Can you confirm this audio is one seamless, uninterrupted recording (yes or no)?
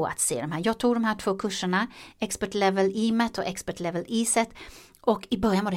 yes